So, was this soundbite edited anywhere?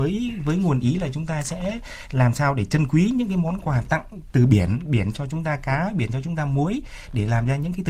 no; 0 cuts

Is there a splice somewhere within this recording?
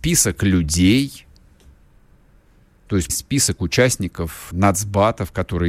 yes; 2 cuts; at 3.1 s, 4.5 s

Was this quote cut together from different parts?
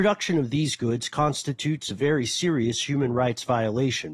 no; 0 cuts

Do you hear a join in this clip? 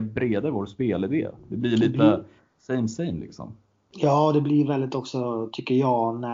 no; 0 cuts

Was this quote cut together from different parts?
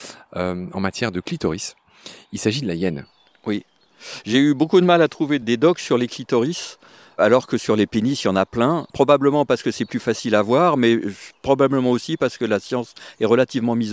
no; 0 cuts

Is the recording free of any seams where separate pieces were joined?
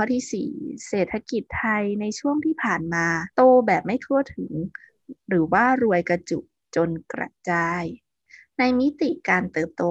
no; 1 cut; at 3.3 s

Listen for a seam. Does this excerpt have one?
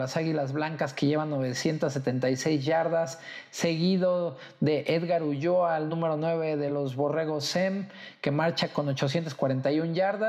no; 0 cuts

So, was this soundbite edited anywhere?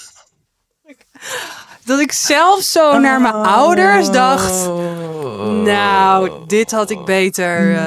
no; 0 cuts

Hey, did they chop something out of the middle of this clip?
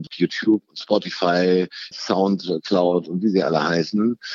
yes; 1 cut; at 1.9 s

